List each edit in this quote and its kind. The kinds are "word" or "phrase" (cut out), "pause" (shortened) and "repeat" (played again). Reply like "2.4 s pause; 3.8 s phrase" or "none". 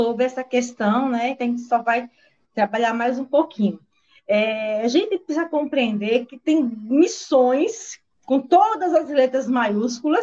none

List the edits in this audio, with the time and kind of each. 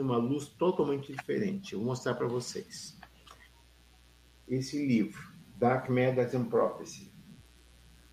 none

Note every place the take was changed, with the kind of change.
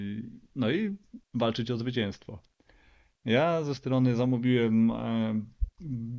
1.2 s pause; 3.8 s word

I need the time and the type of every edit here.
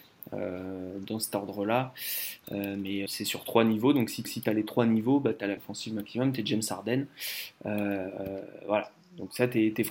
3.1 s word; 4.2 s repeat; 5.6 s word

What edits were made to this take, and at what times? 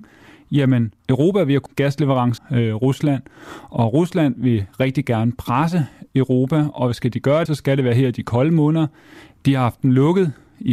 1.0 s pause; 1.7 s phrase; 2.4 s word; 7.5 s word

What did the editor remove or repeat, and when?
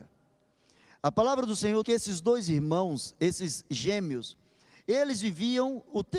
1.8 s word

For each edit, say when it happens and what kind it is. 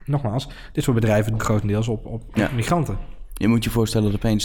1.4 s word

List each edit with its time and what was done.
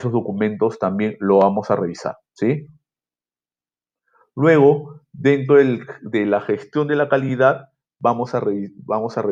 2.3 s pause

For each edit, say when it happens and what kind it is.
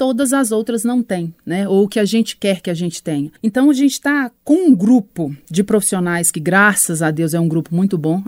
3.4 s pause

